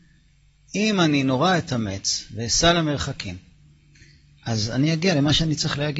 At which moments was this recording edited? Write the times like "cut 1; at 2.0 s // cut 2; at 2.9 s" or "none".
none